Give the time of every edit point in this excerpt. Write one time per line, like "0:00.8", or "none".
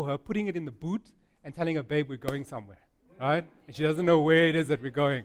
none